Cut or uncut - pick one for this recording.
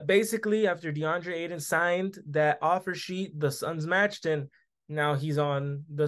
uncut